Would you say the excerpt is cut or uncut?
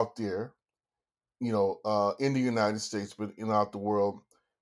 uncut